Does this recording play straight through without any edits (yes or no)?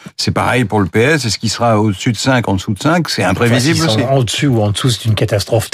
yes